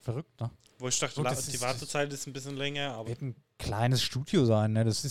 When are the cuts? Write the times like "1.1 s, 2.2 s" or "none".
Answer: 1.2 s, 3.1 s